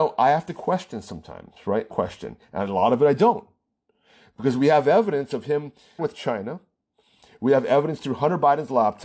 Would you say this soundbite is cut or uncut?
cut